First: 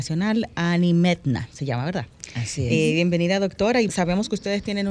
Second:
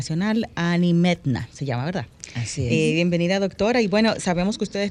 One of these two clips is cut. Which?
first; 1 cut; at 3.9 s

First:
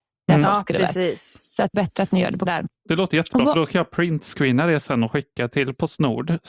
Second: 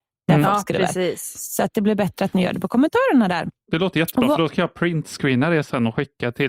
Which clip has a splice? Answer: first; 2 cuts; at 1.7 s, 2.5 s

